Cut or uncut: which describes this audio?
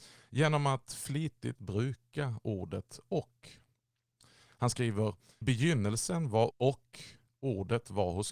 cut